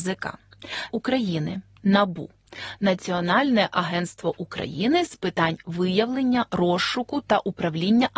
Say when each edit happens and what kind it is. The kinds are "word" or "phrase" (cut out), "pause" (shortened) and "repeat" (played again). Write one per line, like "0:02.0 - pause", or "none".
0:00.9 - phrase